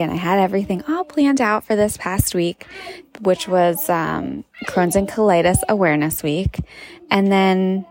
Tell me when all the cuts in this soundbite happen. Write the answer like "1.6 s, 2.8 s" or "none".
none